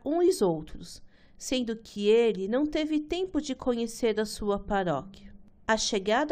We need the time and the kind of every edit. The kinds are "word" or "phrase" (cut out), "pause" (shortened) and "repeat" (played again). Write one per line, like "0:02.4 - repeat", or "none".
none